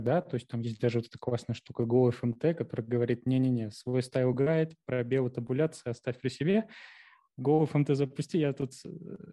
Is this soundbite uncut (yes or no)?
yes